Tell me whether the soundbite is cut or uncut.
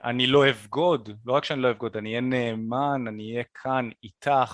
uncut